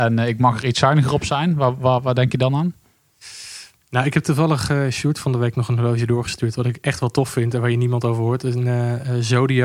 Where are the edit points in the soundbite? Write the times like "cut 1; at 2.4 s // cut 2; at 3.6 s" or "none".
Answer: none